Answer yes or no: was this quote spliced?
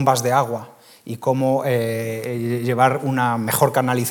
no